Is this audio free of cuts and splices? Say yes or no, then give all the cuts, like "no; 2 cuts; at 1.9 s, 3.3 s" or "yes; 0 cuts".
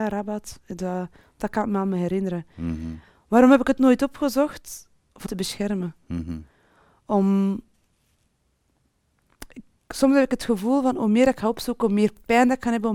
no; 1 cut; at 5.3 s